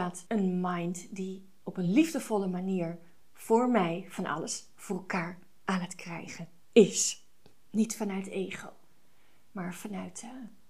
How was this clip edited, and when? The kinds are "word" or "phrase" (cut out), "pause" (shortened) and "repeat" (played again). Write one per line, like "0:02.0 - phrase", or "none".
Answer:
none